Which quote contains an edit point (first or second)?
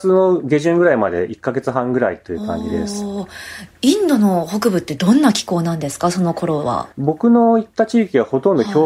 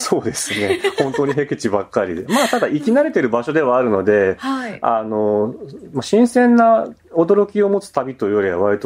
first